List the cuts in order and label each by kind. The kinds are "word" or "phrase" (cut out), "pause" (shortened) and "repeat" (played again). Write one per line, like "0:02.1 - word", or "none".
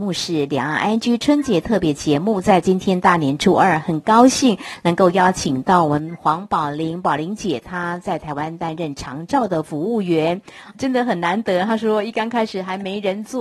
0:10.7 - word